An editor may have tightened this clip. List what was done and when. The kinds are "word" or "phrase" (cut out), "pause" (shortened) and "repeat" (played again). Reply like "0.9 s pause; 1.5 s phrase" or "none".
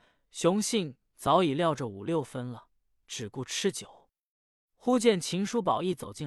3.0 s phrase